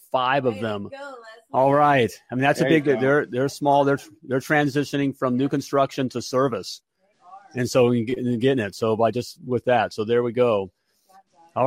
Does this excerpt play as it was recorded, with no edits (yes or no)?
yes